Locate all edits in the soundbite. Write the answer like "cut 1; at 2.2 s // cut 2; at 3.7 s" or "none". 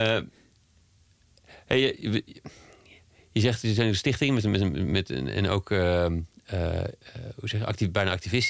none